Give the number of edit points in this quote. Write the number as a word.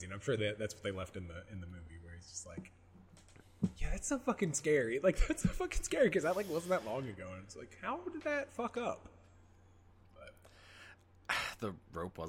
zero